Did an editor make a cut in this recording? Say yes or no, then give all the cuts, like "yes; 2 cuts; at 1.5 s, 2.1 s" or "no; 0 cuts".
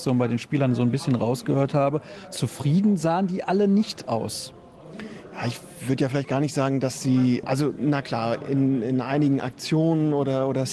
no; 0 cuts